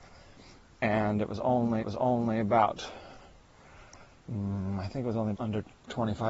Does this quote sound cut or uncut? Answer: cut